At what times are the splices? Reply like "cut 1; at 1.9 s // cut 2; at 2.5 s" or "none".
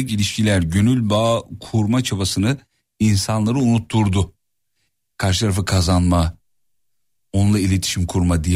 none